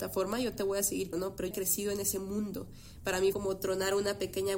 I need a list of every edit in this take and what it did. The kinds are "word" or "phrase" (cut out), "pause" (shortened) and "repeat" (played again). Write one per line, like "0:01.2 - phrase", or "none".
0:01.1 - word
0:01.5 - word
0:03.3 - word